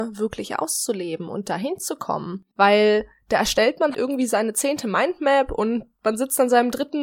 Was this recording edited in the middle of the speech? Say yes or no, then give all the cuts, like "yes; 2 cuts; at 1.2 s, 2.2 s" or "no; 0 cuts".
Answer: yes; 2 cuts; at 2.5 s, 3.9 s